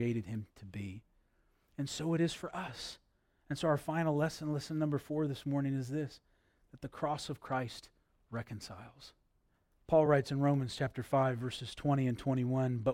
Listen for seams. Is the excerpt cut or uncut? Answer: uncut